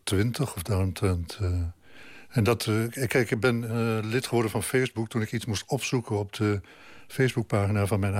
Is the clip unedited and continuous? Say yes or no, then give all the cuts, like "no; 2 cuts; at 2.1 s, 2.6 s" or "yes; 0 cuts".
yes; 0 cuts